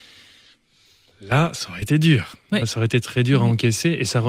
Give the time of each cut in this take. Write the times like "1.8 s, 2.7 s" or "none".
none